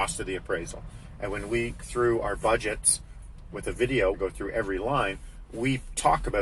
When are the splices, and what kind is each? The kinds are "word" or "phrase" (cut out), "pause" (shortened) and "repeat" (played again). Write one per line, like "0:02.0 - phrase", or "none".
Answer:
0:01.8 - word
0:04.1 - phrase